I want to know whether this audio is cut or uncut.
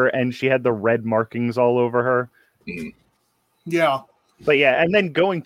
uncut